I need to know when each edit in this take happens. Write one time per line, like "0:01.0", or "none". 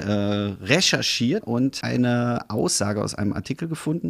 0:01.4
0:01.8